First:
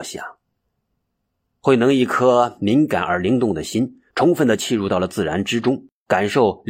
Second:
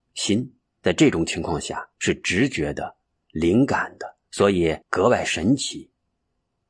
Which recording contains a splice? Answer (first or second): second